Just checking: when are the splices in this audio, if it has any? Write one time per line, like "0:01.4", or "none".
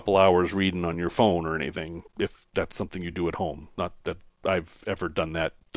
none